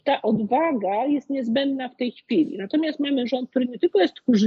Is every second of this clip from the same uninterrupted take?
yes; 0 cuts

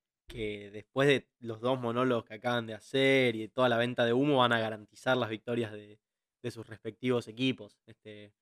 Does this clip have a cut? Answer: no; 0 cuts

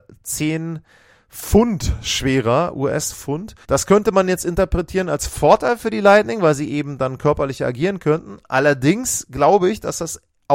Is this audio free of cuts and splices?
no; 1 cut; at 3.6 s

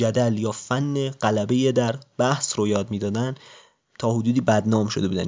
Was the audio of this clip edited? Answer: no; 0 cuts

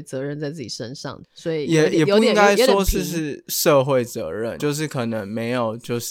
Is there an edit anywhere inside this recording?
yes; 2 cuts; at 1.2 s, 4.6 s

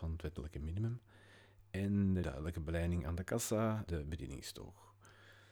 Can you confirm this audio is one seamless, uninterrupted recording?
no; 2 cuts; at 2.2 s, 3.9 s

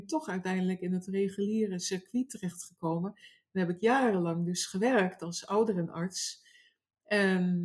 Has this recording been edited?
no; 0 cuts

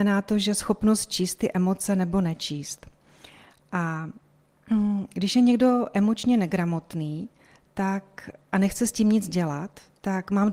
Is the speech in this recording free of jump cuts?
yes; 0 cuts

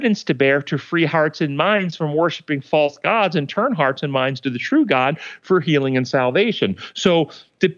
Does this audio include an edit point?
no; 0 cuts

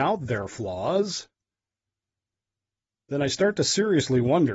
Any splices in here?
no; 0 cuts

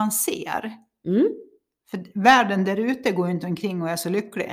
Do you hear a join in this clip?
no; 0 cuts

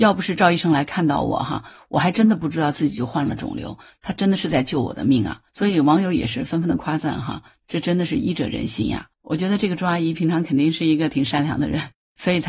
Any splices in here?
yes; 2 cuts; at 5.5 s, 9.1 s

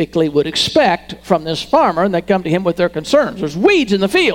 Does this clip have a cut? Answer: no; 0 cuts

